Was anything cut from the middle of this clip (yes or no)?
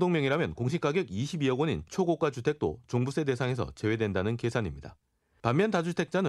no